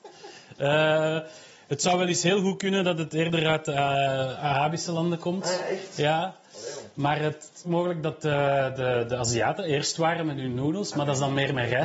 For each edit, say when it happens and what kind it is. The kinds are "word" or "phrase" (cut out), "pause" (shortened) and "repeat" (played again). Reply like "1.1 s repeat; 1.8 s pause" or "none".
7.6 s phrase